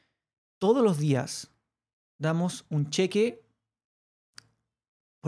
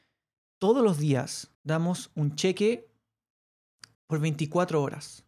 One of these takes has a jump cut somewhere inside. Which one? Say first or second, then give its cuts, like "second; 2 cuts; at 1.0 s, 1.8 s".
second; 2 cuts; at 1.5 s, 3.9 s